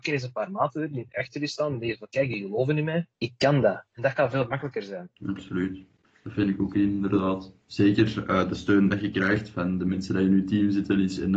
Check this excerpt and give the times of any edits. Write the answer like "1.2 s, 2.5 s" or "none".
3.1 s, 3.9 s, 5.2 s, 7.6 s